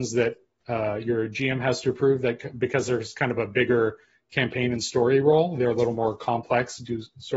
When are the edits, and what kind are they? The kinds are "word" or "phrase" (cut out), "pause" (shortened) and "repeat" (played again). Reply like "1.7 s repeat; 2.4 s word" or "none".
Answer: none